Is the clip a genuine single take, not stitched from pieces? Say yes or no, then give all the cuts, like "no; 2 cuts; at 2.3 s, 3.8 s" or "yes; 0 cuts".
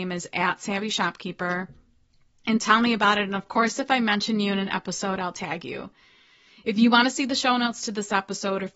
yes; 0 cuts